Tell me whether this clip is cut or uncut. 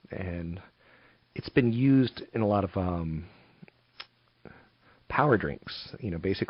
uncut